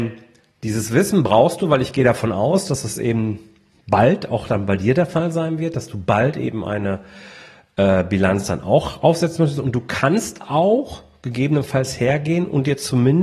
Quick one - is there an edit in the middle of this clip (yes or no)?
no